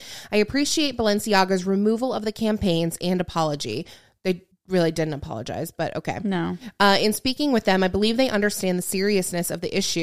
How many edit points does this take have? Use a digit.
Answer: 1